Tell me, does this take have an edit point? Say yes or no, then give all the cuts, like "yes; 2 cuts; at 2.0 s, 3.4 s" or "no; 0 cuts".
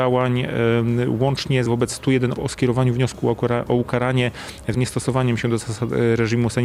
yes; 3 cuts; at 1.7 s, 2.3 s, 4.7 s